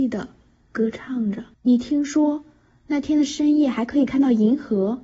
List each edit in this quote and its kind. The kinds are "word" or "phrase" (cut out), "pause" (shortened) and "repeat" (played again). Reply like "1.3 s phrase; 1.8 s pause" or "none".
1.5 s pause